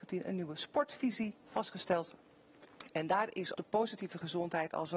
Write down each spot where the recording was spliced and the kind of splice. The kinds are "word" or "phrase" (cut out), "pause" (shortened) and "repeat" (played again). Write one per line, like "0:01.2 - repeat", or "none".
0:03.5 - word